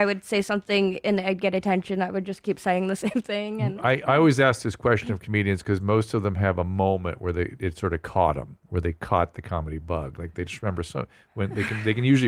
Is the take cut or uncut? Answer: uncut